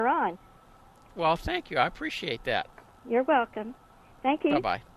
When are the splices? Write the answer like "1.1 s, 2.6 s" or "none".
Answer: none